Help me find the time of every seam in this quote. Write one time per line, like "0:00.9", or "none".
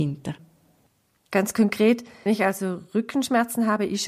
0:02.3